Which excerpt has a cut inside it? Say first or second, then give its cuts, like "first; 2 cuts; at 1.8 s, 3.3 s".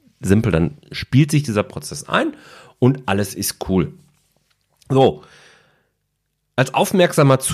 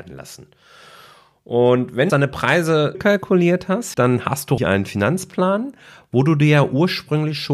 second; 4 cuts; at 2.1 s, 2.9 s, 3.9 s, 4.6 s